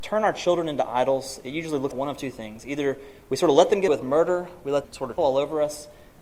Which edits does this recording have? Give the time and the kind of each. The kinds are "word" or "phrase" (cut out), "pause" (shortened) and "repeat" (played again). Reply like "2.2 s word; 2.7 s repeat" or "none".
1.9 s word; 3.9 s word; 4.8 s word; 5.2 s word

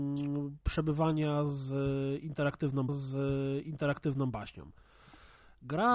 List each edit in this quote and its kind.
2.9 s repeat

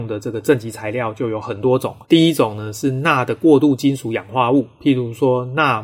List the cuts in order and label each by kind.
2.0 s pause

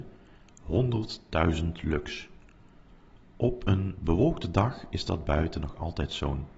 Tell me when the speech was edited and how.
none

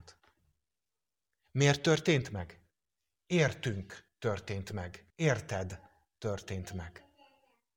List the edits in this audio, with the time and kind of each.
5.1 s pause

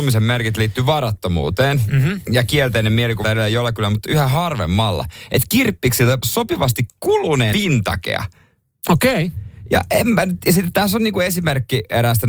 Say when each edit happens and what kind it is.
3.2 s word; 6.2 s word; 7.5 s word

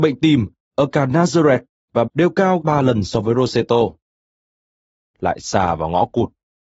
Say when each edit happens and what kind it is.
2.1 s word; 2.6 s word

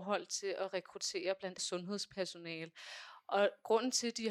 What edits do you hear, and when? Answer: 1.6 s word

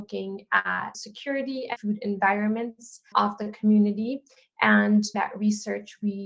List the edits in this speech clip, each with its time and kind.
0.9 s word; 1.8 s word; 3.1 s word; 5.1 s word

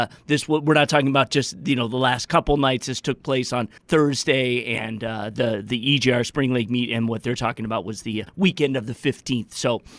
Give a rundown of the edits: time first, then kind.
3.8 s pause; 8.3 s pause

